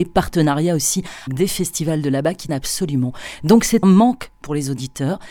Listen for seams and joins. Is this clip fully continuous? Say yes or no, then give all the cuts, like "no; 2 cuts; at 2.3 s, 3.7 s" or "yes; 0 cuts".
no; 3 cuts; at 1.3 s, 2.5 s, 3.8 s